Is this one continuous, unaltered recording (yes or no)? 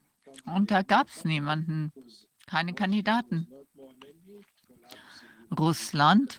yes